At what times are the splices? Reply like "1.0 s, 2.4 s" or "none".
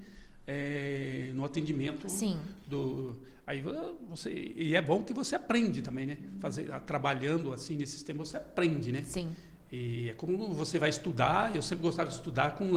none

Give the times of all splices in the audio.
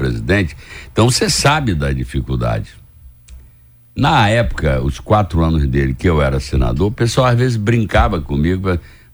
none

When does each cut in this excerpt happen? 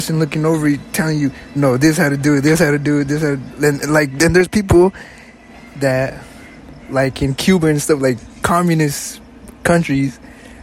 none

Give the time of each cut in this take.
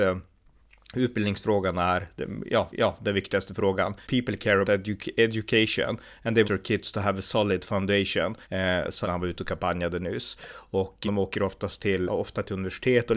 2.7 s, 4.0 s, 4.6 s, 6.4 s, 8.4 s, 9.0 s, 11.0 s, 12.1 s

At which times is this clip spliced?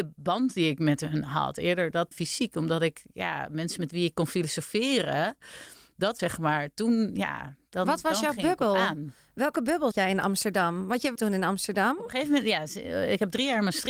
2.1 s, 6.2 s, 9.9 s, 11.2 s

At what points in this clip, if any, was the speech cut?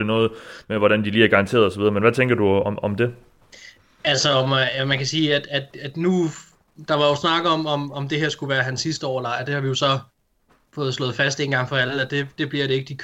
none

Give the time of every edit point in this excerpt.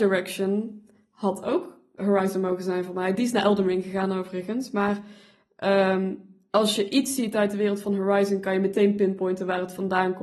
2.0 s

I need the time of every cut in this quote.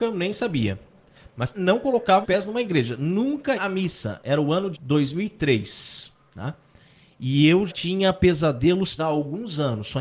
1.5 s, 2.2 s, 3.5 s, 4.7 s, 7.7 s, 9.0 s

